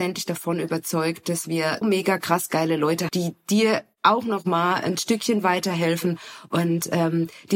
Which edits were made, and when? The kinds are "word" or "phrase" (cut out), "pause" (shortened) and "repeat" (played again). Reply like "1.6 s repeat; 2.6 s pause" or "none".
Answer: 1.8 s word; 3.1 s word